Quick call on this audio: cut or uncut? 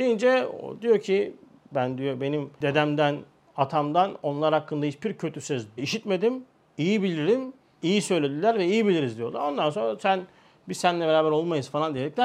uncut